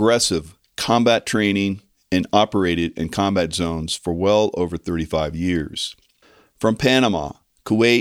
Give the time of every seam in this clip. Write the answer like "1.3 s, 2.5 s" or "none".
none

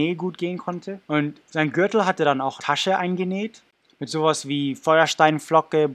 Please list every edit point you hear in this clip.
1.0 s, 2.6 s

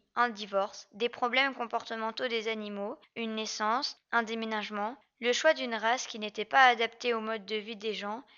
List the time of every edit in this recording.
none

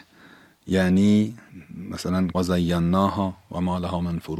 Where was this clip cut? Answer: 2.3 s

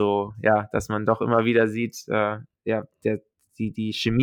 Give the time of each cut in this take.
none

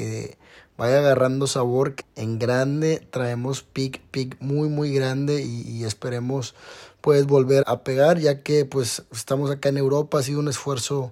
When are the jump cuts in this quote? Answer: 2.0 s, 7.6 s

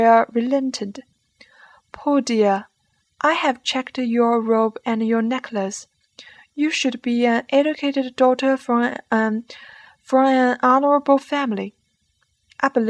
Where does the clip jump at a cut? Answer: none

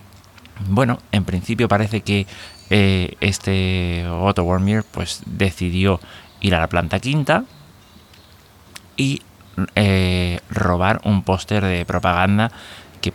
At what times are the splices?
3.2 s

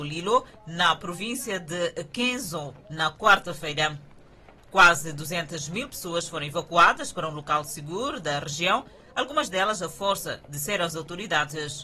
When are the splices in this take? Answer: none

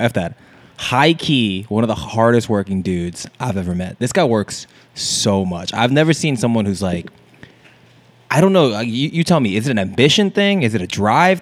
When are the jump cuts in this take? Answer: none

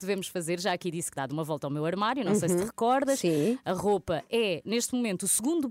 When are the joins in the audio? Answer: 1.2 s

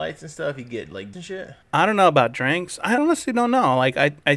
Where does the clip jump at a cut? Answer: 1.1 s, 1.6 s, 3.0 s

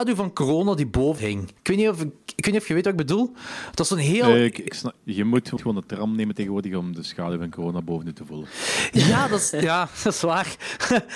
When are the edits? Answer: 1.2 s, 1.6 s, 5.0 s, 5.6 s

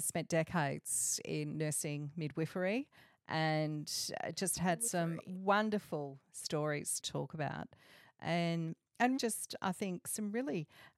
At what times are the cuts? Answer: 7.0 s, 9.2 s

